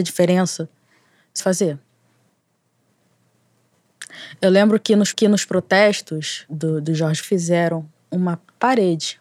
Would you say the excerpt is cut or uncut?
cut